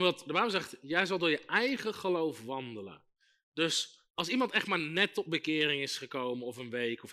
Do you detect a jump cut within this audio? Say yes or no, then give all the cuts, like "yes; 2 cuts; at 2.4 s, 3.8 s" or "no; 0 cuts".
no; 0 cuts